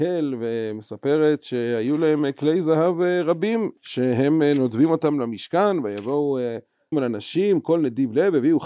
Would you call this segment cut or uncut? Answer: cut